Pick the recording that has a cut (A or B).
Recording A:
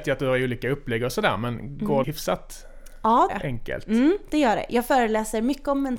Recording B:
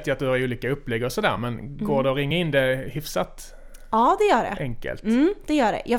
A